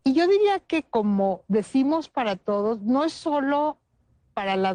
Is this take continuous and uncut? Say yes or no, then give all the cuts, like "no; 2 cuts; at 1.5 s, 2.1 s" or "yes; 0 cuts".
yes; 0 cuts